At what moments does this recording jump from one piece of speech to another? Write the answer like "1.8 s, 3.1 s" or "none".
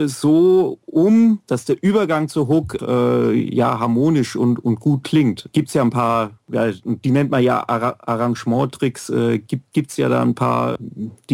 2.8 s